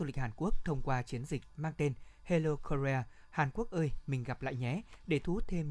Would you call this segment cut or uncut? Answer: uncut